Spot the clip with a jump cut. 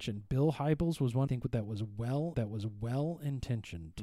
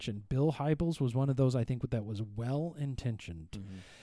first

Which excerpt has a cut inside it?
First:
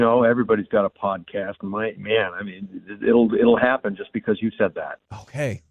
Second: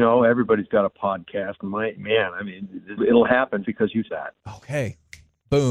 second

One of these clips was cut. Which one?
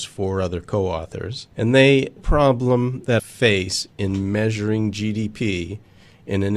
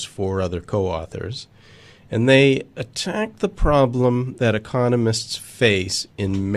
first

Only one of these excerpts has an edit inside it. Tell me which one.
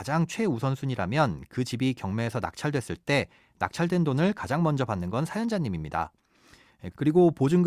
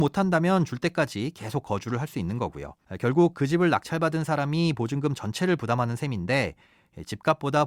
second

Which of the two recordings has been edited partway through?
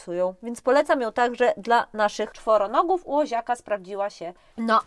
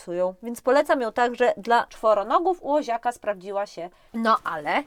second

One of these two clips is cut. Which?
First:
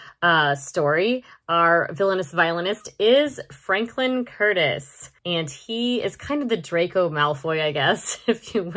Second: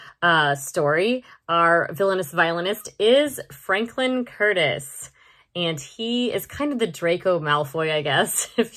first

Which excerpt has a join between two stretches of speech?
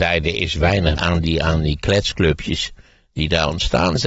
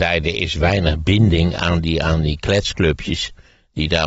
first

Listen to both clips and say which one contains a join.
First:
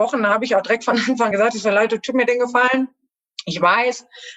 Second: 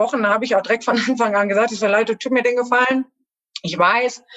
first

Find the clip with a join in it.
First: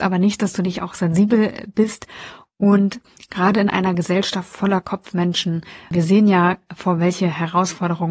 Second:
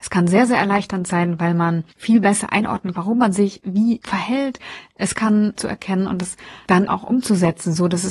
second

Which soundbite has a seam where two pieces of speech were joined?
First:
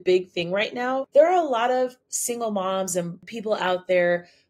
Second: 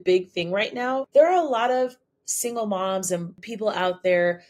first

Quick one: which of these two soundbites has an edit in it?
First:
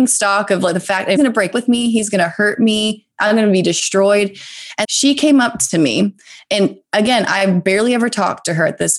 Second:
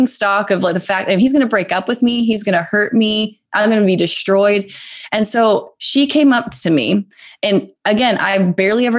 first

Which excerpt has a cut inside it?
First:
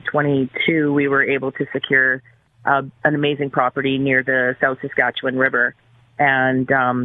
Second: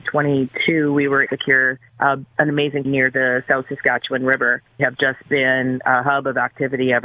second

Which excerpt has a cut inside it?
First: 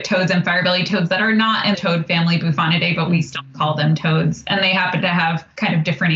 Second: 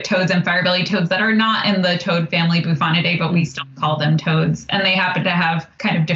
first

